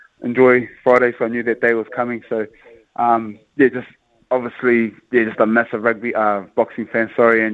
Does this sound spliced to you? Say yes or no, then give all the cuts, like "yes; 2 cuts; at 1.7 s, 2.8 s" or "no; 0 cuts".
no; 0 cuts